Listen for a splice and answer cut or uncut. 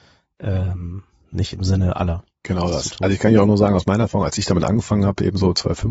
uncut